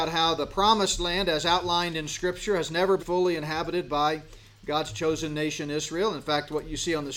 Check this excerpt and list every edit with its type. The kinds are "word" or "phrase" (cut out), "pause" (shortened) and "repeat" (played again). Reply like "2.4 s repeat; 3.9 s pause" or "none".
3.0 s word